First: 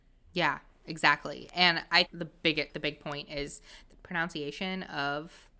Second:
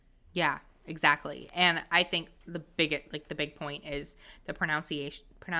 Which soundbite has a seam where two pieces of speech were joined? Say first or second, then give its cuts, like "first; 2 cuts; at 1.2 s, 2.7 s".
first; 3 cuts; at 2.0 s, 2.7 s, 3.9 s